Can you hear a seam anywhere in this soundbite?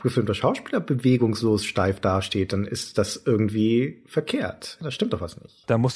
no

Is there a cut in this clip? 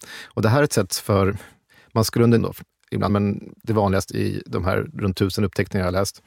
yes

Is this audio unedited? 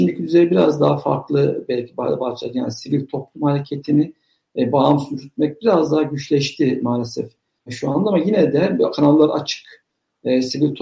yes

